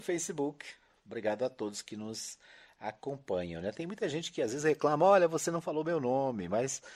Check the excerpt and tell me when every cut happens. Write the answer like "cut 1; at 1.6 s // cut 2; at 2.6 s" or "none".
none